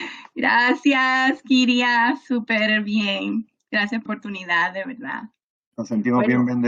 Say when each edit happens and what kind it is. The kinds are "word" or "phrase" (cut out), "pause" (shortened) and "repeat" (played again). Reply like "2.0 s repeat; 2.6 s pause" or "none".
4.1 s word